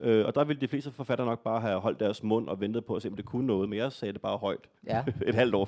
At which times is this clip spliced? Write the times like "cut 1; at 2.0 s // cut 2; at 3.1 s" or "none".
cut 1; at 4.8 s